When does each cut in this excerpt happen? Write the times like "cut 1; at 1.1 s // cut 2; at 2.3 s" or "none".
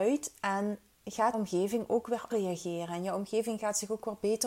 cut 1; at 1.3 s // cut 2; at 2.3 s